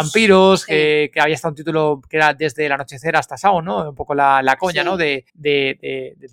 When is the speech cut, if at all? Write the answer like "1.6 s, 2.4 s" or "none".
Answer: 5.3 s